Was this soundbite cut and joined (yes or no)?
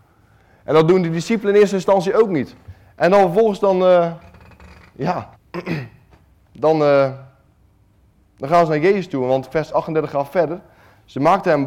yes